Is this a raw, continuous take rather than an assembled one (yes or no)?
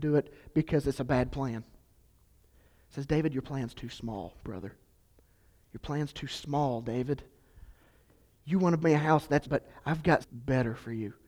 no